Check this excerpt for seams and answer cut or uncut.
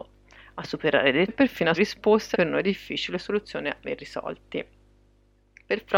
cut